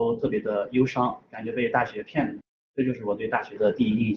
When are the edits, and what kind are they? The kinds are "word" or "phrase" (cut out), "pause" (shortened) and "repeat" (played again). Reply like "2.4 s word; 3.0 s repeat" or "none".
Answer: none